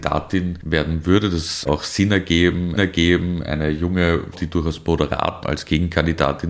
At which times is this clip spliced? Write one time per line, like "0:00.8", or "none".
0:01.7
0:02.8
0:04.3
0:05.4